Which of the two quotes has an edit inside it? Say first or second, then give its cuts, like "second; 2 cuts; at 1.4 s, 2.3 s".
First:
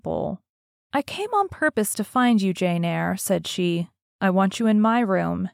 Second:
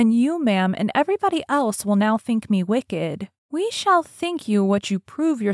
second; 1 cut; at 3.4 s